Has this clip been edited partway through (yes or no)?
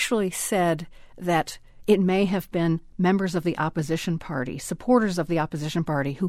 no